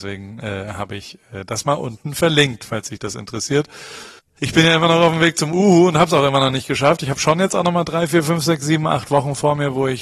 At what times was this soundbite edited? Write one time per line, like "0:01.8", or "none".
0:04.2